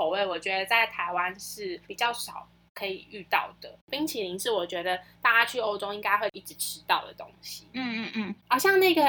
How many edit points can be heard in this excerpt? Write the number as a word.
two